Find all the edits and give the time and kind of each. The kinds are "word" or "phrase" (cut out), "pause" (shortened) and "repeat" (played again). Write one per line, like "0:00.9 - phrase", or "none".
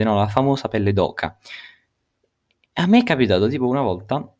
none